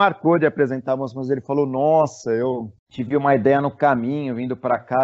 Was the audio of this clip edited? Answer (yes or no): yes